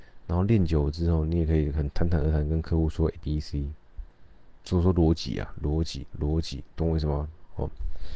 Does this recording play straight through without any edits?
no; 3 cuts; at 3.2 s, 4.6 s, 6.1 s

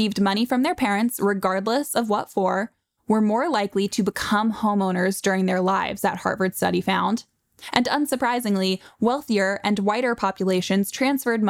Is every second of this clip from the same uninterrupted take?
yes; 0 cuts

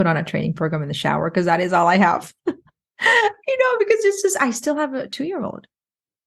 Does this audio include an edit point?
no; 0 cuts

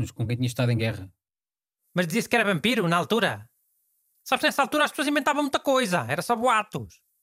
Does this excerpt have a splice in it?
no; 0 cuts

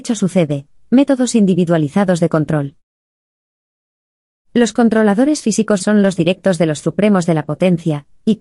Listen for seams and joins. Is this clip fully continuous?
no; 3 cuts; at 5.8 s, 6.2 s, 6.8 s

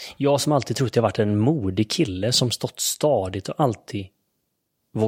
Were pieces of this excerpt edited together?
no; 0 cuts

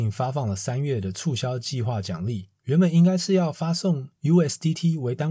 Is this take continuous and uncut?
yes; 0 cuts

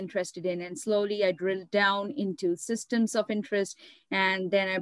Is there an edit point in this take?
no; 0 cuts

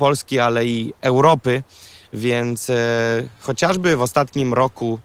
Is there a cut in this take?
no; 0 cuts

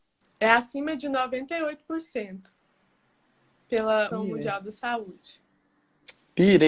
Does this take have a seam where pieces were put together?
yes; 1 cut; at 4.1 s

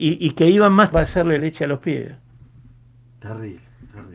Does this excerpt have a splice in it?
yes; 2 cuts; at 0.9 s, 1.4 s

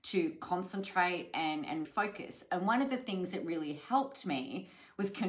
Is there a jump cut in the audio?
yes; 1 cut; at 1.8 s

